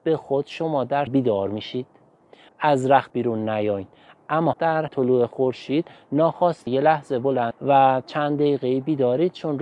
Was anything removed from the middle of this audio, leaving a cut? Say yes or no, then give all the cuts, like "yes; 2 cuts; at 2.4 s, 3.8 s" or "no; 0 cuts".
yes; 7 cuts; at 1.1 s, 2.5 s, 3.1 s, 4.5 s, 4.9 s, 6.7 s, 7.5 s